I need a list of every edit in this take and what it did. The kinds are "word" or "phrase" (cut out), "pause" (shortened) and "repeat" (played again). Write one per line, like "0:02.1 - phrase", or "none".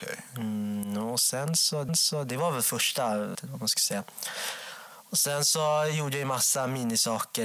0:01.9 - repeat
0:03.3 - phrase